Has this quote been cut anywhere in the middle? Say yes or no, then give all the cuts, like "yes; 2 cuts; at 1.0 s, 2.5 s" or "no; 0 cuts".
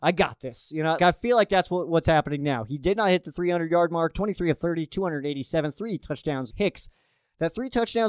yes; 2 cuts; at 1.0 s, 6.5 s